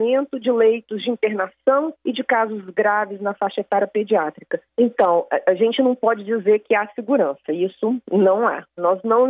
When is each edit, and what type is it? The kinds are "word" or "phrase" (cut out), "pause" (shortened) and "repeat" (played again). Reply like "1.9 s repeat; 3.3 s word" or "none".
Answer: 2.0 s pause; 4.7 s pause